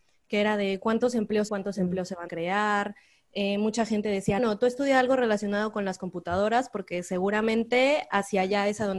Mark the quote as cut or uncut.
cut